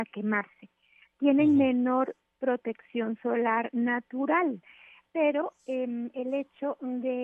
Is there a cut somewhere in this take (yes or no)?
no